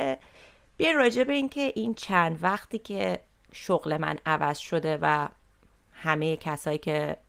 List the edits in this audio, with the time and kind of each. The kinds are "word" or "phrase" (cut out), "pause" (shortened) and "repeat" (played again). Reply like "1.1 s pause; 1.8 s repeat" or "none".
none